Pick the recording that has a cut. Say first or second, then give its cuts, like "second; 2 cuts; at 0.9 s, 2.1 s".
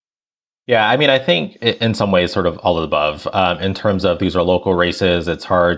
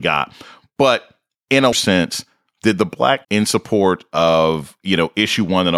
second; 2 cuts; at 1.7 s, 3.2 s